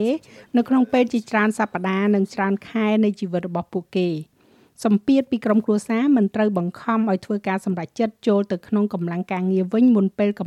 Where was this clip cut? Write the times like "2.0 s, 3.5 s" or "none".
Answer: none